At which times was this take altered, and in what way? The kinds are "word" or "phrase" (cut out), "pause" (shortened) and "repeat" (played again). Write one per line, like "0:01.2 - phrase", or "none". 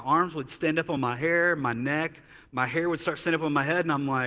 none